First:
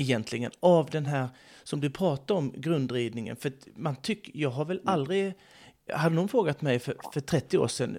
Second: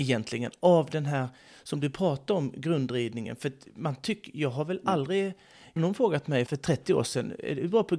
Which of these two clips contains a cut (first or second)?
second